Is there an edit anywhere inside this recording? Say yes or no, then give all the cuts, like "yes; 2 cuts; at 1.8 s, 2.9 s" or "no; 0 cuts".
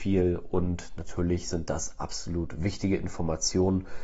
no; 0 cuts